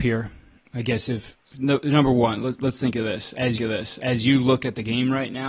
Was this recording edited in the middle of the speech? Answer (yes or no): yes